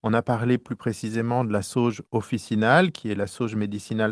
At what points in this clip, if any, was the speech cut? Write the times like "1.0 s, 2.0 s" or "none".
2.1 s